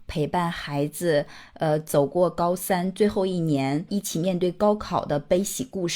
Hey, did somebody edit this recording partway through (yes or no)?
yes